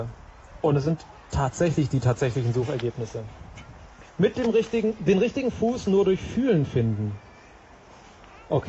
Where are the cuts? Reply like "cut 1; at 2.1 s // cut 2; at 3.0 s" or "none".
cut 1; at 4.1 s